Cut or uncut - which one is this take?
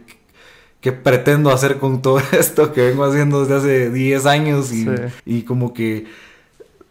cut